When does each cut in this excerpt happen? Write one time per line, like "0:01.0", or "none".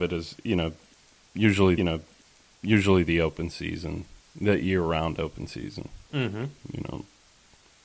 0:01.8